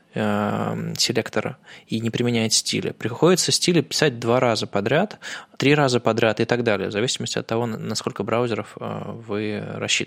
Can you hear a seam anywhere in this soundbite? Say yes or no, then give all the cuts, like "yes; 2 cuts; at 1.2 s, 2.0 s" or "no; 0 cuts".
yes; 1 cut; at 5.5 s